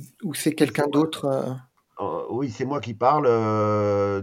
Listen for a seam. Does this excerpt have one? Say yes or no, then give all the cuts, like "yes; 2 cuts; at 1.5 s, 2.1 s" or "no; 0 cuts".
no; 0 cuts